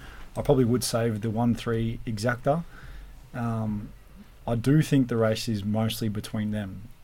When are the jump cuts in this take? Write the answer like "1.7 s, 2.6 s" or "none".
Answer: none